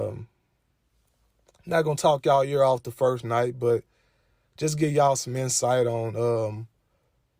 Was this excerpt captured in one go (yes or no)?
yes